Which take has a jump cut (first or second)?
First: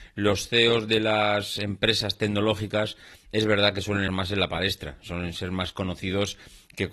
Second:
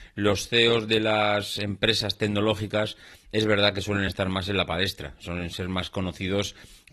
first